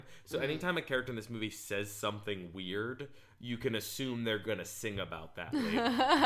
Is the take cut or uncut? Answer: uncut